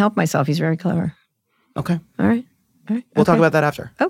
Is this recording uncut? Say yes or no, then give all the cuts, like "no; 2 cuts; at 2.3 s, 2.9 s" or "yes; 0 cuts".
yes; 0 cuts